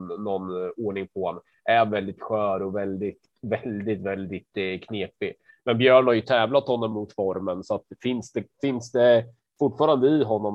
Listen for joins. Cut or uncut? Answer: uncut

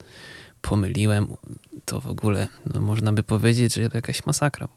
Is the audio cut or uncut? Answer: cut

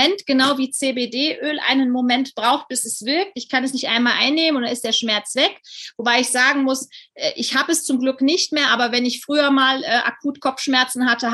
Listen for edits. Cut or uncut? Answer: uncut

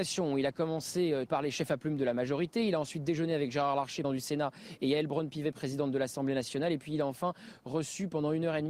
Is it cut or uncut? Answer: cut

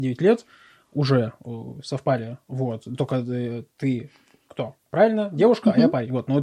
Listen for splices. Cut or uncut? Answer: uncut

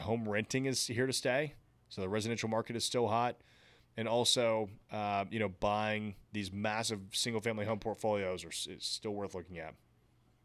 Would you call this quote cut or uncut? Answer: cut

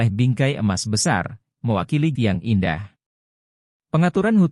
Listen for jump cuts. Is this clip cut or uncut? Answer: cut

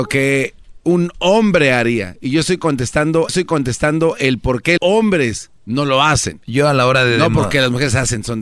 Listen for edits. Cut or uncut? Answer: cut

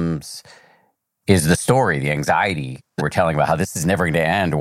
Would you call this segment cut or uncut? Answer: cut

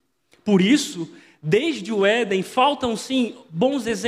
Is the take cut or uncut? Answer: uncut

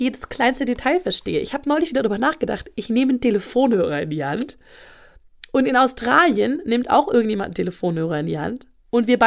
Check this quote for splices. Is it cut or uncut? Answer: uncut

